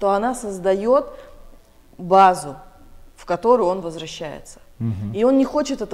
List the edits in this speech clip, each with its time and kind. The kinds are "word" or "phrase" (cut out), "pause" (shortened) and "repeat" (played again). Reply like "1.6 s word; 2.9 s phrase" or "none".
none